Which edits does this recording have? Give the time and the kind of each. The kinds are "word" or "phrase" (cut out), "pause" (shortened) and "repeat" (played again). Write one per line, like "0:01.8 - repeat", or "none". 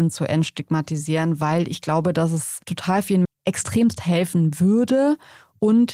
0:02.6 - pause
0:03.2 - word